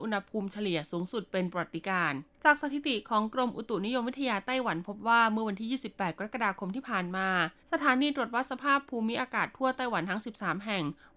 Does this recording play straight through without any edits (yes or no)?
no